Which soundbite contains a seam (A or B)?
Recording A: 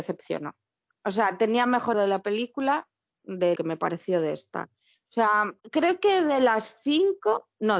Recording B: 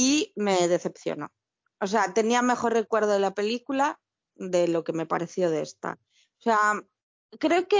A